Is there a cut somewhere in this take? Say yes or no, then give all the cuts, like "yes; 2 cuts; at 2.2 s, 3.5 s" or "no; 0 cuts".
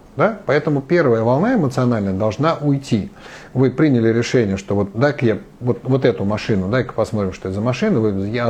no; 0 cuts